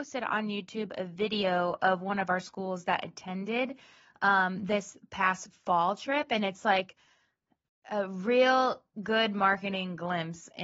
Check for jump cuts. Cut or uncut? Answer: uncut